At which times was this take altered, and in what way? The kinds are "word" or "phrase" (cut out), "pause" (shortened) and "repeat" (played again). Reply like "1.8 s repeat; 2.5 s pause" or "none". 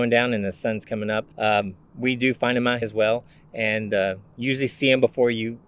1.3 s pause; 2.8 s phrase